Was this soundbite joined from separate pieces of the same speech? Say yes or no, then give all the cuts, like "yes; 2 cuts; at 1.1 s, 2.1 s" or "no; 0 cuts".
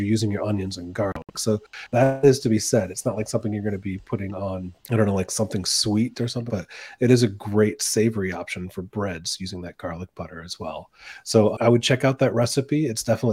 yes; 3 cuts; at 4.8 s, 6.5 s, 11.5 s